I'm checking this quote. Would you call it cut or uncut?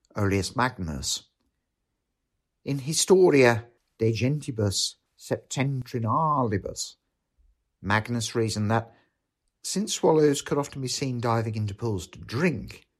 uncut